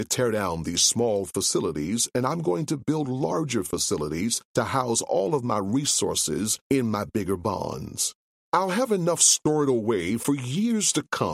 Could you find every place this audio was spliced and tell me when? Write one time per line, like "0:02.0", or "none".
0:04.4
0:06.6
0:08.2